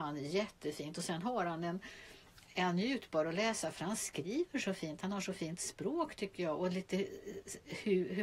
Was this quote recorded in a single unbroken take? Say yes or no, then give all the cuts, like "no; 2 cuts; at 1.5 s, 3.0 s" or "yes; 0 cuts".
yes; 0 cuts